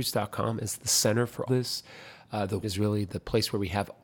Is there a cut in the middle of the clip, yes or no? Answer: yes